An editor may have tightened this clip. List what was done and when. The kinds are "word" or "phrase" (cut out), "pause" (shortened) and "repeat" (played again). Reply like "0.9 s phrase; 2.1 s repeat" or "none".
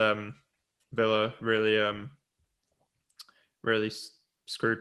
none